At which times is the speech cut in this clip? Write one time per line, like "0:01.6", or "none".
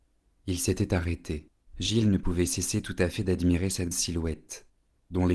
0:01.7
0:03.9